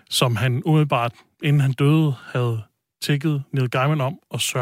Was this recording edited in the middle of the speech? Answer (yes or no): no